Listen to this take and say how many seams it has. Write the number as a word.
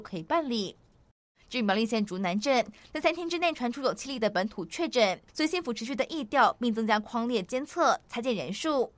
one